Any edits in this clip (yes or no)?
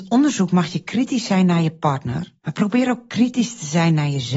yes